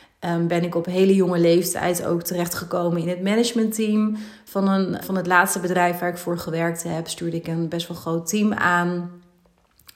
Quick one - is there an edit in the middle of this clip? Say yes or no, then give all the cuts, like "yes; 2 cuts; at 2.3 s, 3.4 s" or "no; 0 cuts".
yes; 1 cut; at 5.0 s